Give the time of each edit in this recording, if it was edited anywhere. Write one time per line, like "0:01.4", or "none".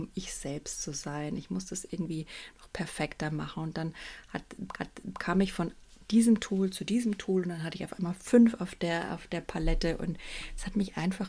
0:04.7